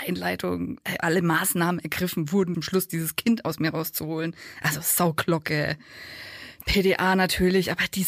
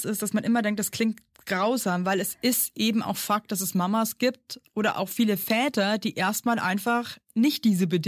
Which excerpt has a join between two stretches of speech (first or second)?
first